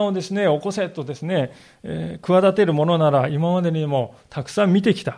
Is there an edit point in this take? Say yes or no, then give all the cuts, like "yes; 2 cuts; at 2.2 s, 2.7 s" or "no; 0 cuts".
no; 0 cuts